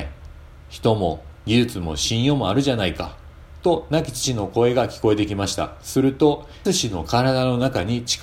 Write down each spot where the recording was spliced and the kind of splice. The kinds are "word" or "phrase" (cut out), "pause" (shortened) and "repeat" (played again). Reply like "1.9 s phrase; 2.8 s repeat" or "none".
6.6 s word